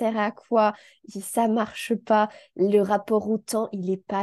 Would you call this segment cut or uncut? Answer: uncut